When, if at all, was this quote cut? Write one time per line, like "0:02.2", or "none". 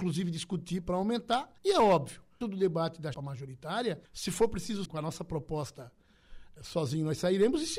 0:01.6
0:02.4
0:03.1
0:04.0
0:04.8
0:06.6